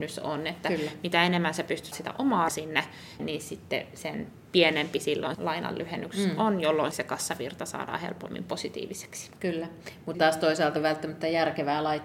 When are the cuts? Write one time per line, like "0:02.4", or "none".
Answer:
0:01.9
0:02.5
0:03.2
0:05.3
0:06.9
0:10.1
0:10.8